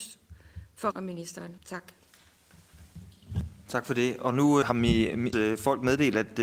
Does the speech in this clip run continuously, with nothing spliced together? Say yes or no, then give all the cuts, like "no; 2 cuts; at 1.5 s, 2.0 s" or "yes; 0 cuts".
no; 4 cuts; at 0.9 s, 1.6 s, 4.6 s, 5.3 s